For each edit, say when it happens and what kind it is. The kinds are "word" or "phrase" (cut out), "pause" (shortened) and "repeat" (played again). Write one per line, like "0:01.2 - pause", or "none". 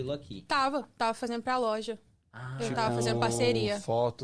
none